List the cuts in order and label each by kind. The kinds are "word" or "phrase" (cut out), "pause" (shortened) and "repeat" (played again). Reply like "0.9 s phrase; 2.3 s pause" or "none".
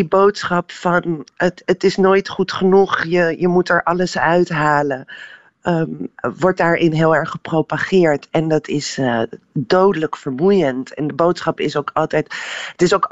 none